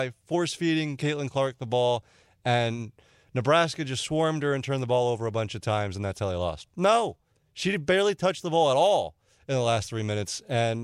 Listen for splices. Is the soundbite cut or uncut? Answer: uncut